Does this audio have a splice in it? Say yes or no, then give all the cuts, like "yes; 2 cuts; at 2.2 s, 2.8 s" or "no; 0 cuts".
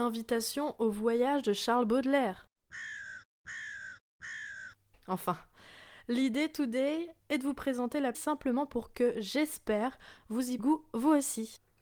yes; 4 cuts; at 4.9 s, 7.2 s, 8.1 s, 10.6 s